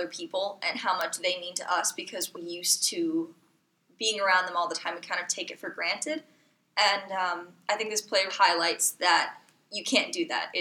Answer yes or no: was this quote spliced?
yes